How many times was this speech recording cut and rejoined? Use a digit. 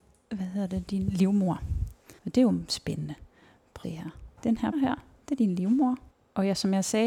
5